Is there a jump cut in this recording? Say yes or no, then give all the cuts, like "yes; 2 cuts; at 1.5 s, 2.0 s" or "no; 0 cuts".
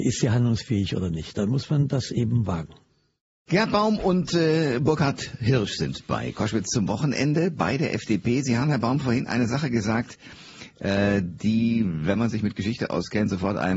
no; 0 cuts